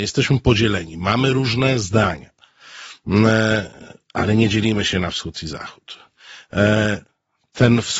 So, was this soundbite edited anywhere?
no; 0 cuts

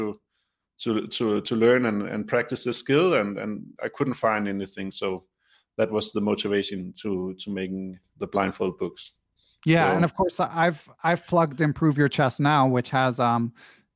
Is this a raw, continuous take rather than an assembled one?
yes; 0 cuts

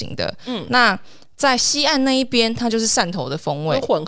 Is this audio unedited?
yes; 0 cuts

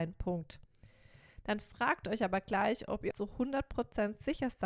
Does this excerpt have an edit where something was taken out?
yes; 1 cut; at 3.1 s

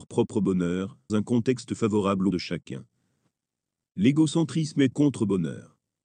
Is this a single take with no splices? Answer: no; 3 cuts; at 1.1 s, 2.3 s, 4.9 s

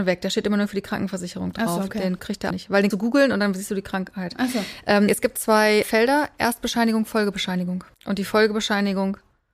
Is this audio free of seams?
no; 6 cuts; at 2.2 s, 2.5 s, 2.9 s, 5.1 s, 5.8 s, 7.9 s

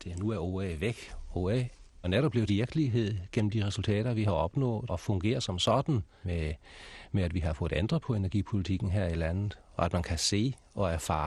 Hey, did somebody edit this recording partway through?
yes; 4 cuts; at 2.0 s, 2.5 s, 4.9 s, 6.2 s

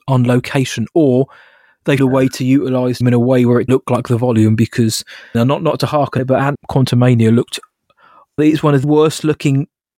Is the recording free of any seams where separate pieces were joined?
no; 8 cuts; at 2.0 s, 3.0 s, 3.7 s, 5.3 s, 6.2 s, 6.5 s, 8.4 s, 8.8 s

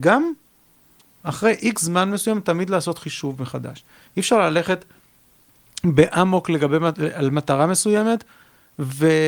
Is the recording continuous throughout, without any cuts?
yes; 0 cuts

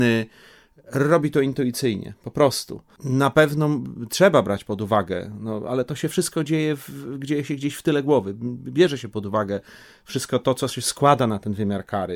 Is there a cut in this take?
no; 0 cuts

